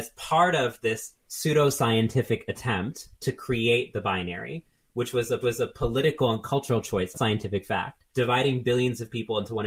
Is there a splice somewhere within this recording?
yes; 4 cuts; at 1.2 s, 5.4 s, 7.1 s, 8.1 s

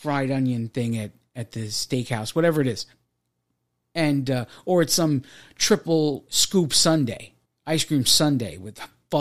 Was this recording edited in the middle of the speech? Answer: yes; 2 cuts; at 6.3 s, 7.5 s

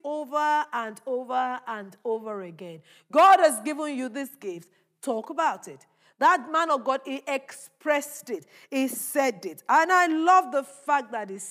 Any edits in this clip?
no; 0 cuts

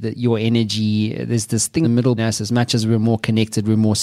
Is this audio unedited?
no; 2 cuts; at 1.8 s, 2.2 s

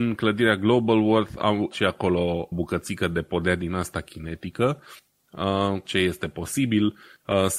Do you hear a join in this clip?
yes; 3 cuts; at 1.7 s, 2.5 s, 5.8 s

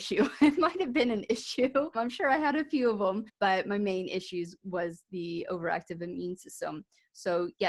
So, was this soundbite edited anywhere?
no; 0 cuts

